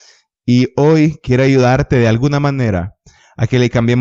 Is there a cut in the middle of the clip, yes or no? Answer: no